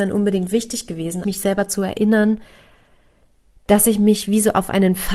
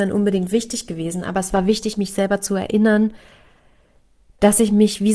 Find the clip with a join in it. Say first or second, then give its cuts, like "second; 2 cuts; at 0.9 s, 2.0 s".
first; 1 cut; at 1.2 s